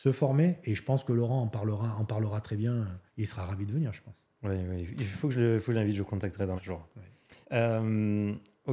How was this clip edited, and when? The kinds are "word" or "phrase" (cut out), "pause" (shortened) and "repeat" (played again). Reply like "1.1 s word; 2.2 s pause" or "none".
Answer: 3.1 s pause; 6.6 s phrase; 7.4 s pause